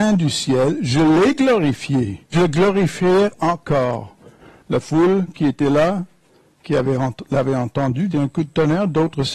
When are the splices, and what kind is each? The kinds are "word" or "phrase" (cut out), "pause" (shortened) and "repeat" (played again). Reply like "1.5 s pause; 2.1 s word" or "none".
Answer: 2.3 s word; 8.1 s phrase